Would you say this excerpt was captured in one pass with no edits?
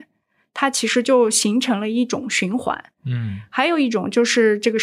yes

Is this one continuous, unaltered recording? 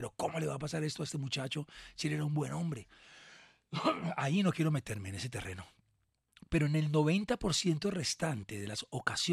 yes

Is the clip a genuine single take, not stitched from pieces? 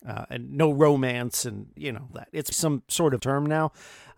no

